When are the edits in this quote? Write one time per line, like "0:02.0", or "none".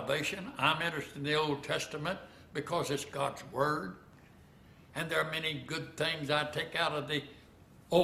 none